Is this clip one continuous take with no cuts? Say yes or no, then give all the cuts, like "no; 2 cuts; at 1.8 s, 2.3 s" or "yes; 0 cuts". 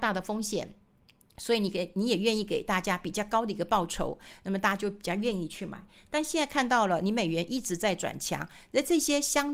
yes; 0 cuts